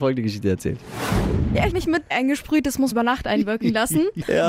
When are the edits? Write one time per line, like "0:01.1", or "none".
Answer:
0:01.7
0:02.1
0:02.9